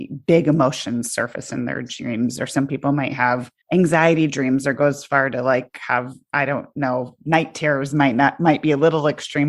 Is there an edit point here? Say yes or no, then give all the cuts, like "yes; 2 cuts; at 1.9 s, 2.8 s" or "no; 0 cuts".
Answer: yes; 1 cut; at 3.6 s